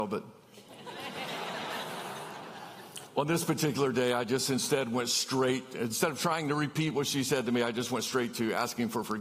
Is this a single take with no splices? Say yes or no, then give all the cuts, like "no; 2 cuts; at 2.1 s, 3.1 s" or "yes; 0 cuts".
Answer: yes; 0 cuts